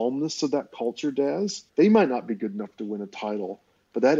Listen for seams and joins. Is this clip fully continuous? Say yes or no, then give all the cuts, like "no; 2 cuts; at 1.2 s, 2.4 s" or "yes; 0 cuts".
no; 1 cut; at 1.7 s